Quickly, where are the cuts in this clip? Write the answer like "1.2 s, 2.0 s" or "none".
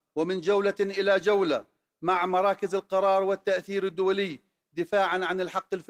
none